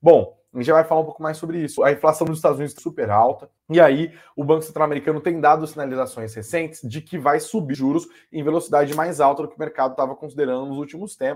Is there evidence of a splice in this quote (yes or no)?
yes